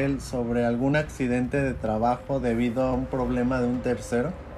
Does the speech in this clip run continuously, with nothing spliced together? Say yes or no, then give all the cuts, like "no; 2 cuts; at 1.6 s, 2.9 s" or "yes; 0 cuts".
yes; 0 cuts